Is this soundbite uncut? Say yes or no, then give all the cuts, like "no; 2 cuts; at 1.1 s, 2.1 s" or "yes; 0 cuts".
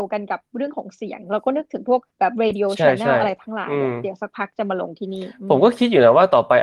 no; 1 cut; at 2.1 s